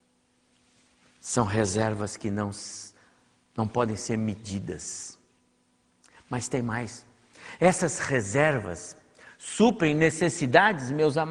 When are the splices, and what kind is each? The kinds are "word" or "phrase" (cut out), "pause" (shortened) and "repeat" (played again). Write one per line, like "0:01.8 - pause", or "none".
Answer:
none